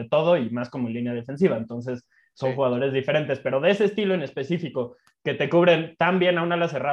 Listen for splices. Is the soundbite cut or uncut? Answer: uncut